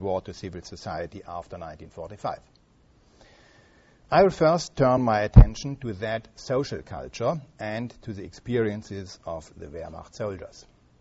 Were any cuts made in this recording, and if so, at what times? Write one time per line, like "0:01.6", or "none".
none